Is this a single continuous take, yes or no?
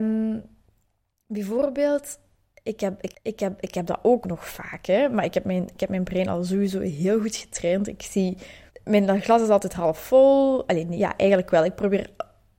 no